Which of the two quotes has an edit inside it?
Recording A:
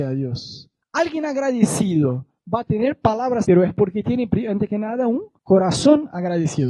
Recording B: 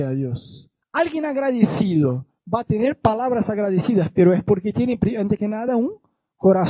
A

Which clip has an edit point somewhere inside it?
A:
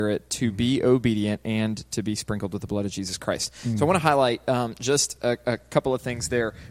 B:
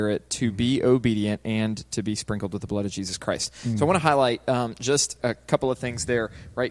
B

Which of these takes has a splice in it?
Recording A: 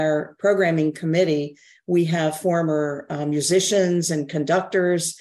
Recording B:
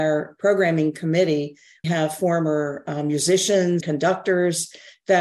B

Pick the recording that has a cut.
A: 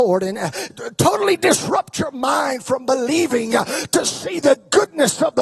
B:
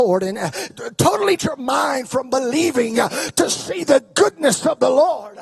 B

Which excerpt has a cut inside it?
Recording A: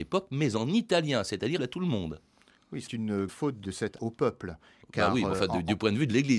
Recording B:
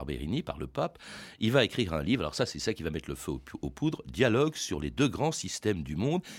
A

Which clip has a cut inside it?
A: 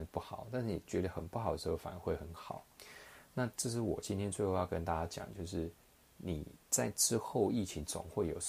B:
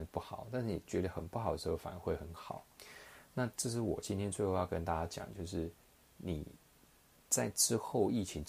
A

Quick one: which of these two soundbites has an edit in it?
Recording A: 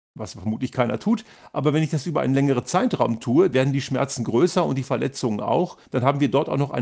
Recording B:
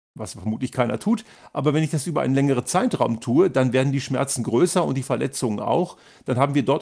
A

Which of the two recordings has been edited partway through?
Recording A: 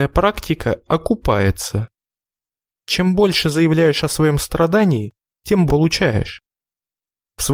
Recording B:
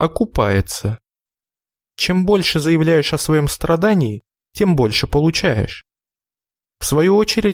A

